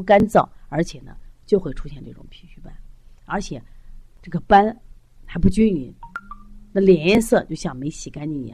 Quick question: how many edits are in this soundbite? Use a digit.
0